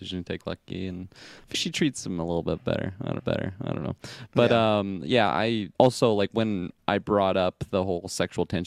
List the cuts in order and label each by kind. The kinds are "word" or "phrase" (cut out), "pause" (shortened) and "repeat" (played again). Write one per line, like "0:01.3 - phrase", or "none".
0:01.5 - word
0:03.2 - repeat
0:05.7 - pause
0:06.8 - pause